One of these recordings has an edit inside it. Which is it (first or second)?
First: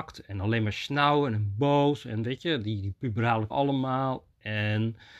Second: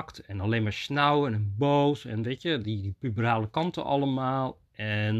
first